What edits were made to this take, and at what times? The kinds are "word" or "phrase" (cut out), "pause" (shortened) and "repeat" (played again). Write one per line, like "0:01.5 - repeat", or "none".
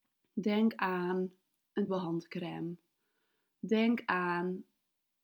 0:01.9 - word